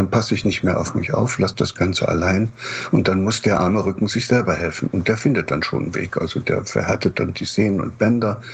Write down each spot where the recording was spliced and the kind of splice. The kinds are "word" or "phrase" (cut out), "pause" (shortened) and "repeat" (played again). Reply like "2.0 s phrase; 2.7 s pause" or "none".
none